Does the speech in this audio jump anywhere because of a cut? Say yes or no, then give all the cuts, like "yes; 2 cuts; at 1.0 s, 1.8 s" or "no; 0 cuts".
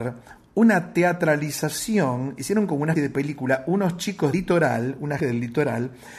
yes; 3 cuts; at 2.9 s, 4.3 s, 5.2 s